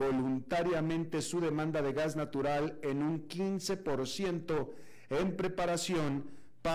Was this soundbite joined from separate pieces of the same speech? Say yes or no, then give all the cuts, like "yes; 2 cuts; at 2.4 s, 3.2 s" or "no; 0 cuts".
no; 0 cuts